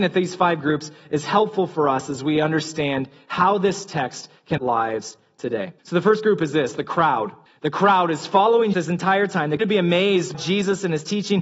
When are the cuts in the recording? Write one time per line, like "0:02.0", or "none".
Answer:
0:04.6
0:05.8
0:07.5
0:08.7
0:09.6
0:10.3